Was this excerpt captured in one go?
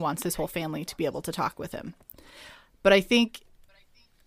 yes; 0 cuts

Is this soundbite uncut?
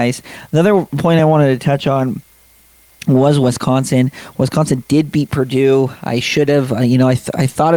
yes; 0 cuts

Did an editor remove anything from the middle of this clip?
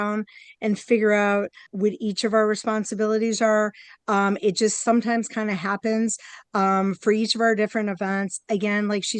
yes; 1 cut; at 1.7 s

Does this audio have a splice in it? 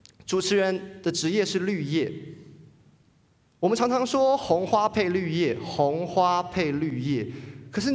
no; 0 cuts

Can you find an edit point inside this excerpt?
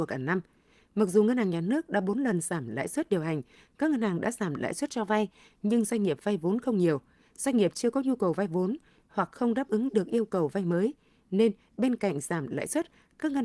no; 0 cuts

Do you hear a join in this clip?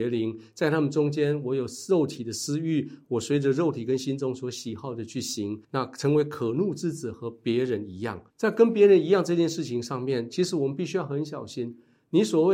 yes; 2 cuts; at 5.6 s, 8.3 s

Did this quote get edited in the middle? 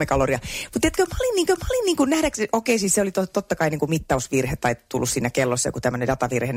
yes; 1 cut; at 1.5 s

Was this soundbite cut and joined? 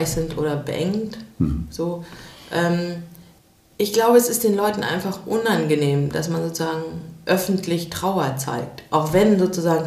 no; 0 cuts

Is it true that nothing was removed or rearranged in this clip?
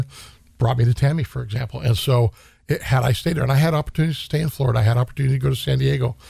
yes; 0 cuts

